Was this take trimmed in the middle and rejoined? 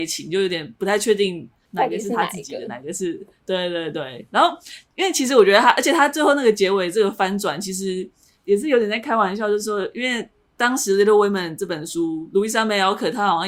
no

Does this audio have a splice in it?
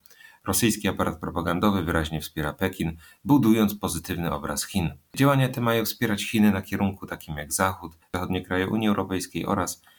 no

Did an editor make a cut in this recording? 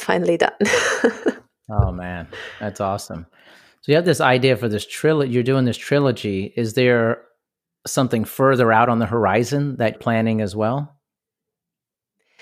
yes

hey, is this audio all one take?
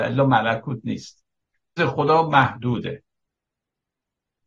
no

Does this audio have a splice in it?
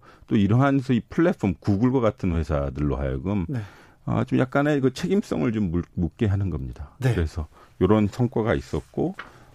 no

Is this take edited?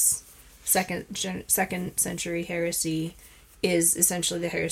no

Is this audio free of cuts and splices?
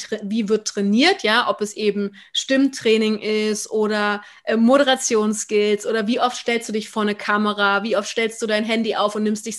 yes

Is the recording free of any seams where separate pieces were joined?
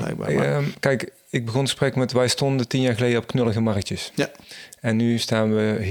yes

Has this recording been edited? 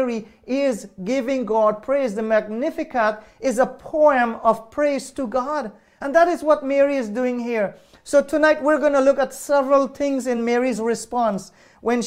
no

